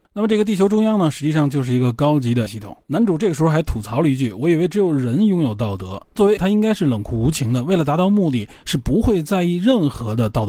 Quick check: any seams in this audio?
yes; 3 cuts; at 2.5 s, 2.8 s, 6.4 s

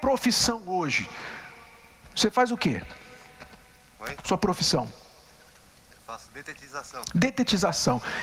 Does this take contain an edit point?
no; 0 cuts

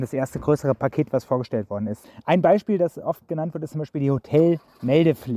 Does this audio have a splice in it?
no; 0 cuts

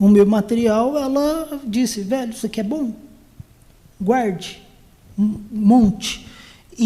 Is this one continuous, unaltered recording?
yes; 0 cuts

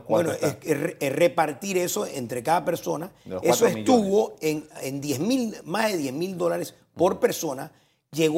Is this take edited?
no; 0 cuts

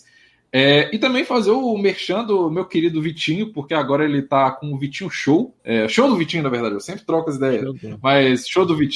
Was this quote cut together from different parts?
yes; 1 cut; at 5.6 s

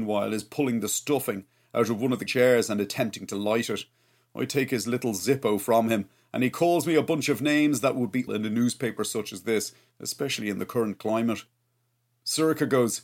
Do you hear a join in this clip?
yes; 2 cuts; at 2.3 s, 8.3 s

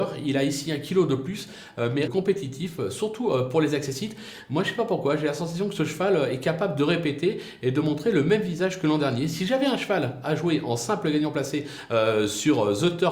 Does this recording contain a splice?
yes; 1 cut; at 2.1 s

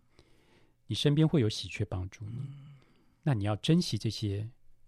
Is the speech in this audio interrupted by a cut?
no; 0 cuts

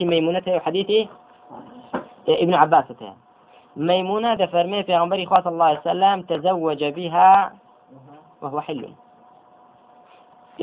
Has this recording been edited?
no; 0 cuts

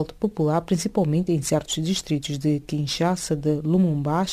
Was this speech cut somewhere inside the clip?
no; 0 cuts

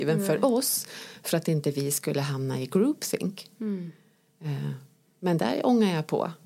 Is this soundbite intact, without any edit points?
yes; 0 cuts

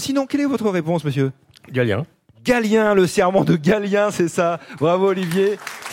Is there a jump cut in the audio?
no; 0 cuts

